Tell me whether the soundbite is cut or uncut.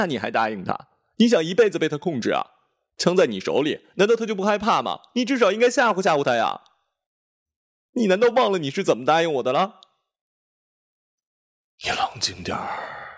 uncut